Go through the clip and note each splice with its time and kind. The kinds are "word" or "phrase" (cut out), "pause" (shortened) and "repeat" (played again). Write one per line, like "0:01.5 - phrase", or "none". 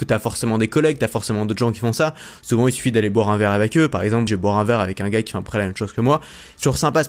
0:04.3 - word